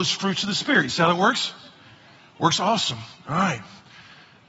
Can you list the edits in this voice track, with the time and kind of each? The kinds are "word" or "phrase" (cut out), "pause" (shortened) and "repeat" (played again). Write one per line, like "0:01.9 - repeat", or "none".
none